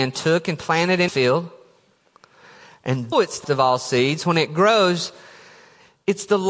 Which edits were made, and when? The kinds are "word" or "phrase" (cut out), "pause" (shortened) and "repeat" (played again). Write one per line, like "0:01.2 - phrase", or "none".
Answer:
0:01.1 - word
0:03.1 - word
0:03.4 - word